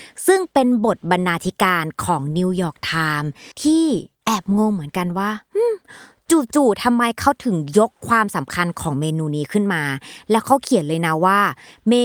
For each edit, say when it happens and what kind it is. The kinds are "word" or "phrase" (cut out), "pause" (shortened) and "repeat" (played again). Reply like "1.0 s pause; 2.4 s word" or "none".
3.5 s pause; 8.0 s pause

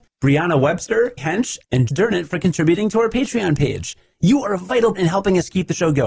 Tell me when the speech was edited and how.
1.2 s word; 1.9 s word; 4.9 s word

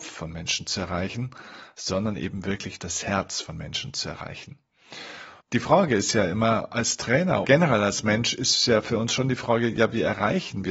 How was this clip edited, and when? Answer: 5.4 s pause; 7.4 s phrase

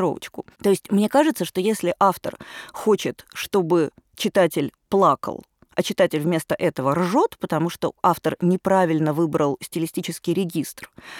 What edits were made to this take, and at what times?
none

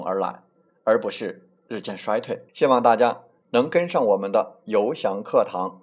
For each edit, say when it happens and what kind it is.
1.6 s pause; 2.5 s pause

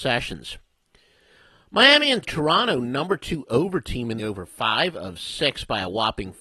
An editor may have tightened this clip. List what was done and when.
2.2 s word; 4.2 s phrase

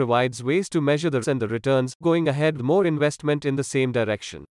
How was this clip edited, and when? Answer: 1.2 s word; 2.0 s word; 2.6 s word

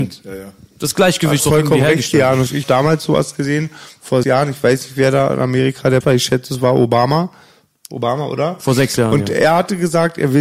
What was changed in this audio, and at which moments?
1.4 s word; 2.6 s word; 4.2 s word; 6.0 s word

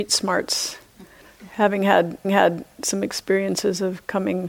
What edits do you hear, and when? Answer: 2.2 s repeat

